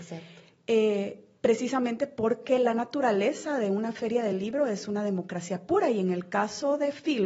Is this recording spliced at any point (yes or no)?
no